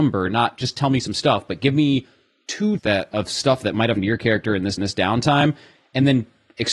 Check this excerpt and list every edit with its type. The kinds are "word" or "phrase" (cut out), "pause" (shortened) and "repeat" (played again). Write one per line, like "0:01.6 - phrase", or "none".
0:02.8 - word
0:04.0 - word
0:04.8 - repeat